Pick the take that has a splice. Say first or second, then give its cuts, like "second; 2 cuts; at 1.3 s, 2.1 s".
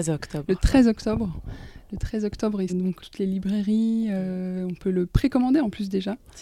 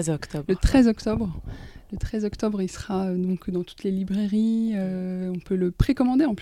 first; 2 cuts; at 2.7 s, 3.0 s